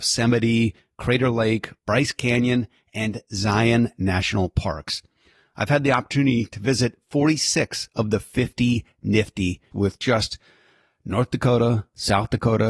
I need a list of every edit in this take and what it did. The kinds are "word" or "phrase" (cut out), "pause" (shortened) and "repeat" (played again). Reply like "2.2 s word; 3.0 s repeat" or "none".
9.7 s phrase